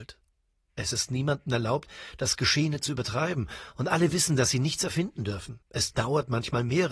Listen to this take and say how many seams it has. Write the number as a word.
one